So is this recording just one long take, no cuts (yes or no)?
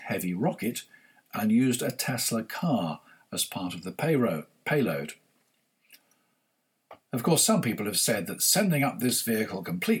yes